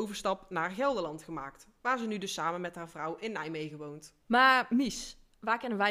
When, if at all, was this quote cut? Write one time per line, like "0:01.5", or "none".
0:04.2